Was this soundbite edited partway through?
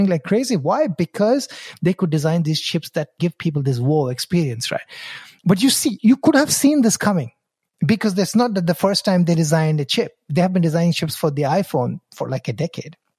no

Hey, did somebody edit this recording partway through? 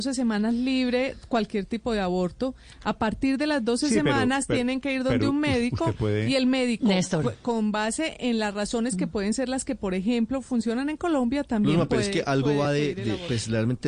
no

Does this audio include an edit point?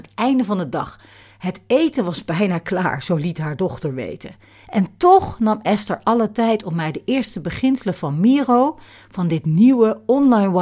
no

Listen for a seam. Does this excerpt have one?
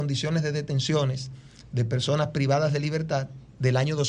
no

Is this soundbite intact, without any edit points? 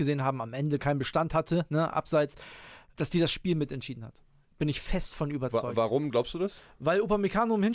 yes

